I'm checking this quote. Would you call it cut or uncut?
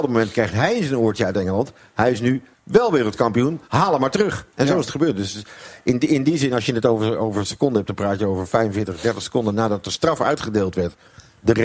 cut